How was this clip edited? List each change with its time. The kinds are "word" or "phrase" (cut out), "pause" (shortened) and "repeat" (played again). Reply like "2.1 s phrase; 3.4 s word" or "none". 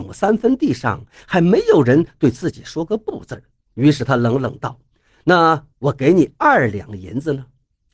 none